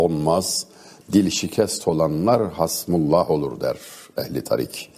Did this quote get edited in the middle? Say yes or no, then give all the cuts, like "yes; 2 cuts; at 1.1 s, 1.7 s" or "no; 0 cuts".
no; 0 cuts